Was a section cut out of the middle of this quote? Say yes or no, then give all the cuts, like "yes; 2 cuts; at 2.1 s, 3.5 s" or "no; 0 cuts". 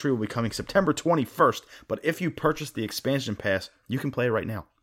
no; 0 cuts